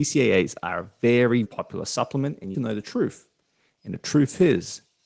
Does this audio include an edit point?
yes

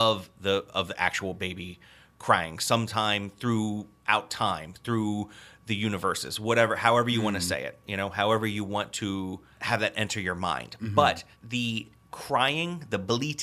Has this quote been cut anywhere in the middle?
no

